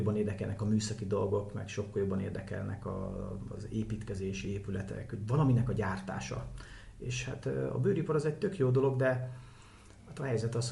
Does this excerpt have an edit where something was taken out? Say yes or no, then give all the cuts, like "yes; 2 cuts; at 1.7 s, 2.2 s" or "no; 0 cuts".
no; 0 cuts